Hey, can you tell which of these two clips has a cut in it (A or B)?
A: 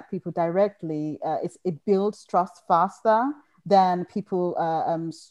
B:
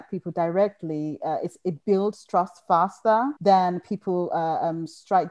B